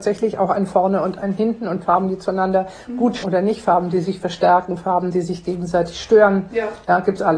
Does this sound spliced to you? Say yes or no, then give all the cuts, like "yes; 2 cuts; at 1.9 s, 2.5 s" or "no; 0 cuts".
yes; 1 cut; at 3.2 s